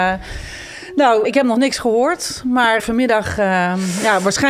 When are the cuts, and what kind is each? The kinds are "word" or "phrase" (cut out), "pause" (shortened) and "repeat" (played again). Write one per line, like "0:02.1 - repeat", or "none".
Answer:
0:01.2 - word
0:02.8 - word